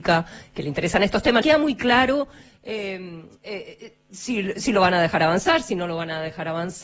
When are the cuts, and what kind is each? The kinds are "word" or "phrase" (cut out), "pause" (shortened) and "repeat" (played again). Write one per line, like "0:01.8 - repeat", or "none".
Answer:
0:01.4 - word